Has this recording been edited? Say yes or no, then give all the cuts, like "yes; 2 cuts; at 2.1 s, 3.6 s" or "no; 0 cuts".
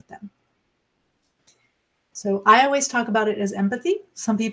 no; 0 cuts